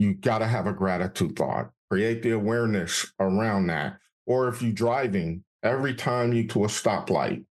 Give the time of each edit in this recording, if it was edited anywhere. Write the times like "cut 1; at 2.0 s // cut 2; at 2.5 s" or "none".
cut 1; at 1.8 s // cut 2; at 6.5 s